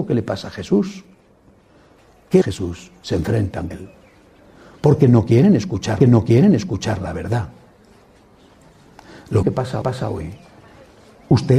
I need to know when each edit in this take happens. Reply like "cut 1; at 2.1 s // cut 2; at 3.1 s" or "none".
cut 1; at 2.4 s // cut 2; at 3.7 s // cut 3; at 6.0 s // cut 4; at 9.4 s // cut 5; at 9.8 s